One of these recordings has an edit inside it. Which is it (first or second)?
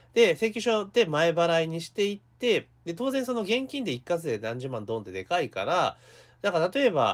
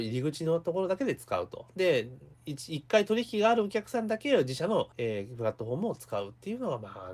second